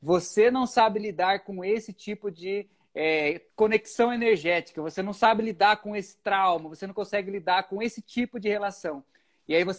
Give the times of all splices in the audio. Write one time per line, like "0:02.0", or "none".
0:03.5